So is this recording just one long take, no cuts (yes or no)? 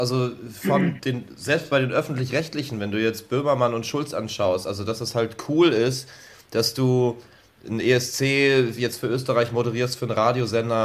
yes